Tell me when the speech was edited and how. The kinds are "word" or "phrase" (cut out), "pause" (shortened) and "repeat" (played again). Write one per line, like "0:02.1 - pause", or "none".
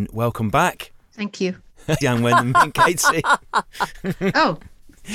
0:02.0 - phrase